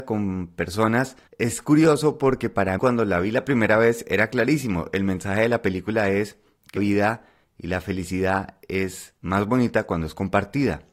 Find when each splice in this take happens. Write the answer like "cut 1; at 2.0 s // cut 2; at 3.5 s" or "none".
cut 1; at 1.3 s // cut 2; at 2.8 s // cut 3; at 6.8 s // cut 4; at 9.2 s